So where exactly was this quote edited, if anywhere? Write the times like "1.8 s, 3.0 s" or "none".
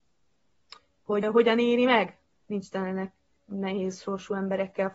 1.2 s, 2.3 s, 3.4 s